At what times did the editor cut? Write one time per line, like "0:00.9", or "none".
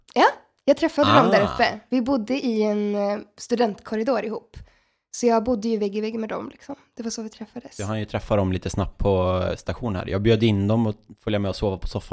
none